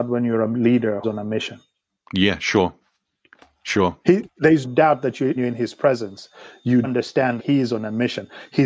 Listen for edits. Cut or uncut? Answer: cut